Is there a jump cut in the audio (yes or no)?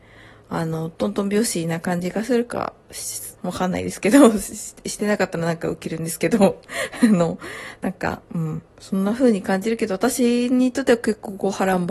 yes